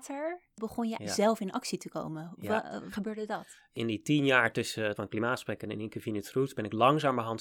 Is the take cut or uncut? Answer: cut